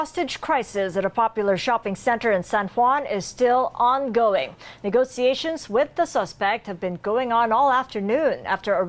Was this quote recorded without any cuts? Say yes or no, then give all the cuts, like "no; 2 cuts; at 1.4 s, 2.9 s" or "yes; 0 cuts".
yes; 0 cuts